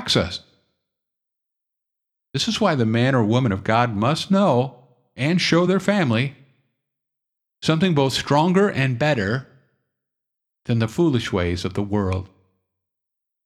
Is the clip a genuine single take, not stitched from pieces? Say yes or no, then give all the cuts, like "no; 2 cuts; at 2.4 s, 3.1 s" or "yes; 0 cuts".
yes; 0 cuts